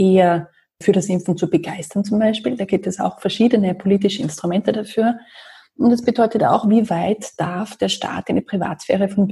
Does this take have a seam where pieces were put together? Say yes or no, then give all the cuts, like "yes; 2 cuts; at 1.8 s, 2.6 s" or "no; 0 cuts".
no; 0 cuts